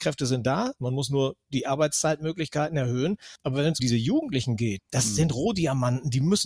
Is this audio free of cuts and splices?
no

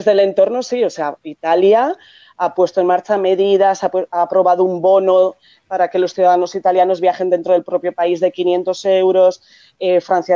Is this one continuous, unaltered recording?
yes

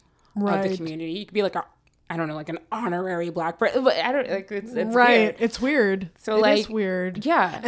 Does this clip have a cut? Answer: no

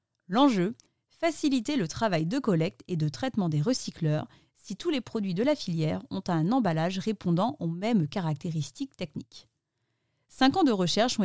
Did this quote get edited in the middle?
no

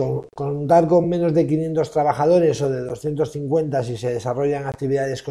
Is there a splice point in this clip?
no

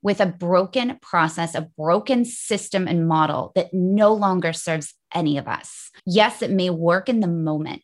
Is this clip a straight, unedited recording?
no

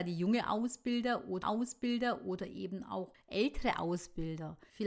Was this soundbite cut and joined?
yes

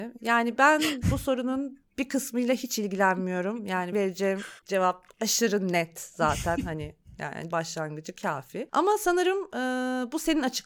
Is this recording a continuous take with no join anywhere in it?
no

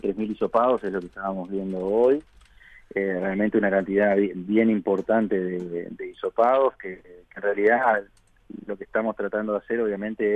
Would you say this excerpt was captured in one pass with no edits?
yes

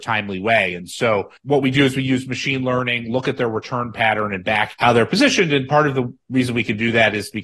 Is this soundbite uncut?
no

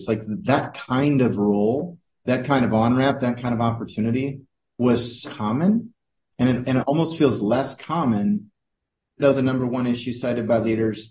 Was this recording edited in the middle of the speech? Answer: yes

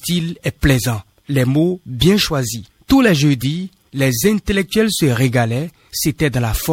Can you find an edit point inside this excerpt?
no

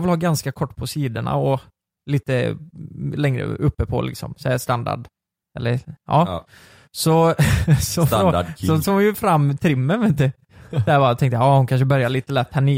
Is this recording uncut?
yes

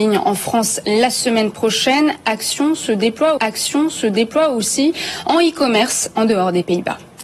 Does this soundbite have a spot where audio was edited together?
yes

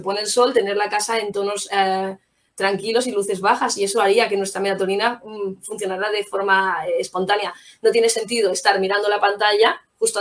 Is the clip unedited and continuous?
yes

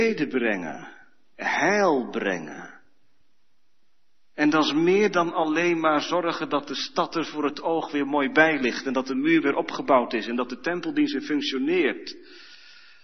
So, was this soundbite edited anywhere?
no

